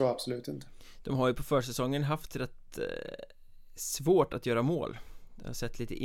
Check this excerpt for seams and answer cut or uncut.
uncut